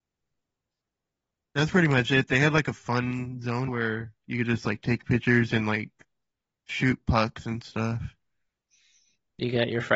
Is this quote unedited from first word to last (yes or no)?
no